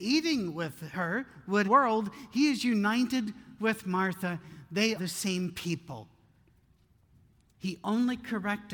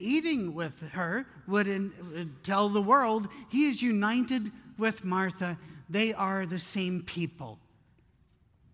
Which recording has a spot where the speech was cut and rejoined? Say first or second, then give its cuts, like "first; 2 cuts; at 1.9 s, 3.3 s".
first; 2 cuts; at 1.6 s, 5.0 s